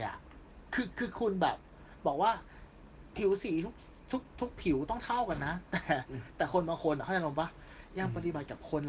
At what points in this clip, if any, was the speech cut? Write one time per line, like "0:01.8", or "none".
none